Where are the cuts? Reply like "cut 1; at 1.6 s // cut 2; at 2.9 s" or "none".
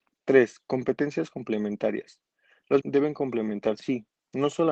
cut 1; at 2.8 s // cut 2; at 3.8 s